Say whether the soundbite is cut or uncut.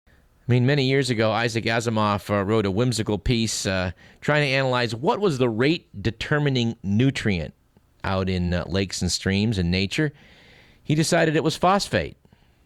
uncut